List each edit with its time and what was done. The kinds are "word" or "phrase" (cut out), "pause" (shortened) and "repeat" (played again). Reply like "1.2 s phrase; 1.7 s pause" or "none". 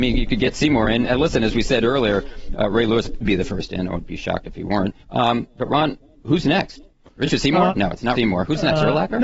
3.2 s word; 5.0 s pause; 8.1 s word